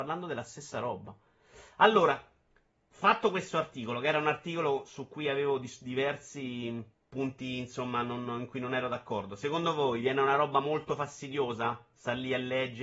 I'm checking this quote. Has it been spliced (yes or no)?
yes